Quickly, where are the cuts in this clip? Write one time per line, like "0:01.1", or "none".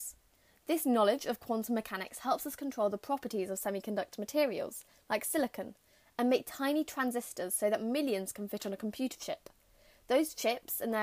none